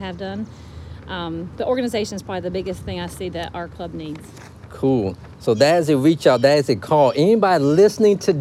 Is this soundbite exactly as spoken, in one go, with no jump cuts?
yes; 0 cuts

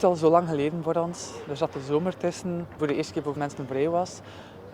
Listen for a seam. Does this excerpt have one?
yes; 2 cuts; at 2.8 s, 3.4 s

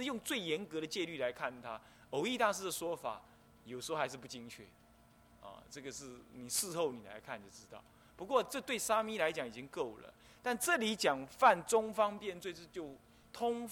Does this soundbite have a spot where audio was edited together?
no; 0 cuts

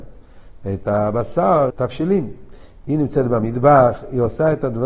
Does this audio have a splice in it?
yes; 1 cut; at 1.7 s

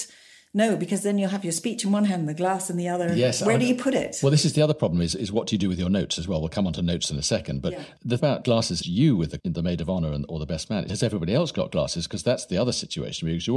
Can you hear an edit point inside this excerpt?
yes; 4 cuts; at 8.2 s, 8.8 s, 9.4 s, 10.9 s

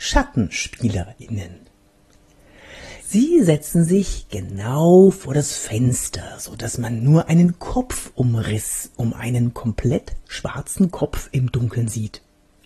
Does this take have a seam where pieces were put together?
yes; 1 cut; at 3.0 s

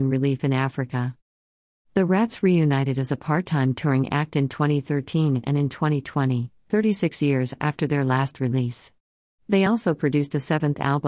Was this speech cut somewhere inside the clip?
no; 0 cuts

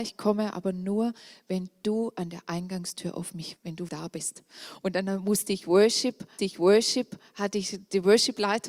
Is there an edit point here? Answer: yes; 3 cuts; at 3.6 s, 3.9 s, 6.4 s

